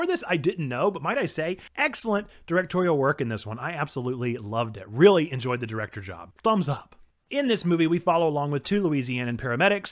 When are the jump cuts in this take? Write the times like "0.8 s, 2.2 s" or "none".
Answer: none